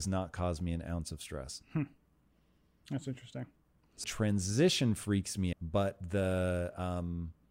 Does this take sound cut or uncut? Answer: cut